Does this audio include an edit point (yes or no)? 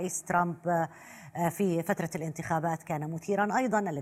no